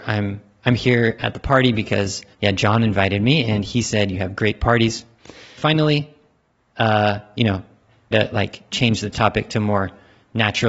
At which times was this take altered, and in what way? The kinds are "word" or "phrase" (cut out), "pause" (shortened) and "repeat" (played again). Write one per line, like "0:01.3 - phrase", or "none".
0:02.3 - pause
0:05.6 - phrase
0:08.1 - word